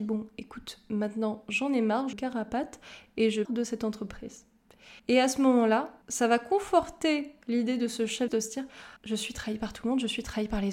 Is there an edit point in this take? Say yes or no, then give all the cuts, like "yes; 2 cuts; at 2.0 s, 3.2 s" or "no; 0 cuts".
yes; 7 cuts; at 2.1 s, 3.4 s, 5.0 s, 6.0 s, 7.4 s, 8.3 s, 9.0 s